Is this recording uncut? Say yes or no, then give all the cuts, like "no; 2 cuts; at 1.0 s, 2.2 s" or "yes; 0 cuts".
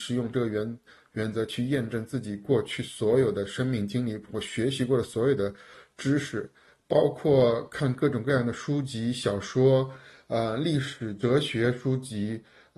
yes; 0 cuts